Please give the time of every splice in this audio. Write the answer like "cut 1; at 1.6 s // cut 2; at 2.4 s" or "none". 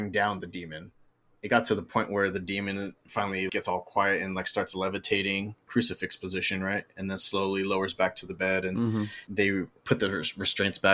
cut 1; at 3.5 s